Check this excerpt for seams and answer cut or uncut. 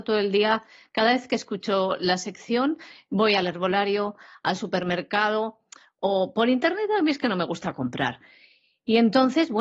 uncut